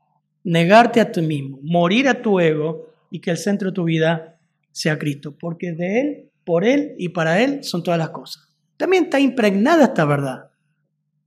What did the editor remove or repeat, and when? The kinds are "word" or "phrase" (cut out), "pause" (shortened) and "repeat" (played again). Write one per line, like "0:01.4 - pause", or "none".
none